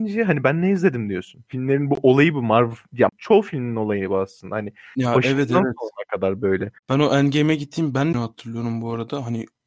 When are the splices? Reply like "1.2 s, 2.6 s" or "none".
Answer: 1.5 s, 3.1 s, 6.8 s, 8.1 s